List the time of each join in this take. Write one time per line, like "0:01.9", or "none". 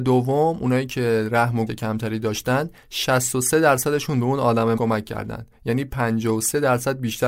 0:01.7
0:04.7